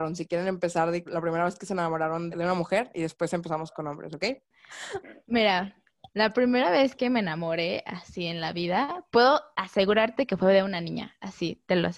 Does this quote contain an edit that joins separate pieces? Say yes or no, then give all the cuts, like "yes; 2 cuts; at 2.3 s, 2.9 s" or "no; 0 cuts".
yes; 2 cuts; at 1.1 s, 2.3 s